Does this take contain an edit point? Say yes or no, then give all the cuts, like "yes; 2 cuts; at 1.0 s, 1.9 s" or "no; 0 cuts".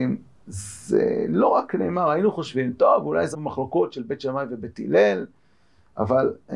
yes; 1 cut; at 3.3 s